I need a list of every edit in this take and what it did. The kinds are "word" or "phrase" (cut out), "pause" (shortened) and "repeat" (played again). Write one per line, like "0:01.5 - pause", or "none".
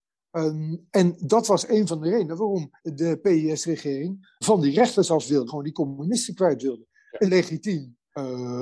0:02.8 - pause
0:04.4 - word
0:05.5 - phrase
0:07.2 - word